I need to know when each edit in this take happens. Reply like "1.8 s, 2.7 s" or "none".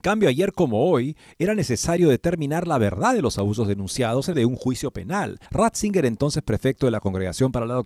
4.3 s, 5.5 s